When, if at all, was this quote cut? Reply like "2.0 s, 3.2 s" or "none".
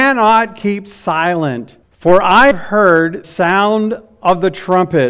1.8 s, 2.5 s, 3.2 s